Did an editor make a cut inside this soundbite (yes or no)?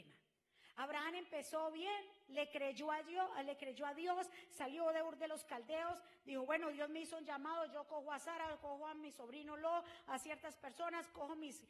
no